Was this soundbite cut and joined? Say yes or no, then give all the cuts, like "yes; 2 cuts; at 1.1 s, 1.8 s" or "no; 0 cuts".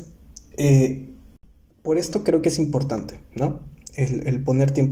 no; 0 cuts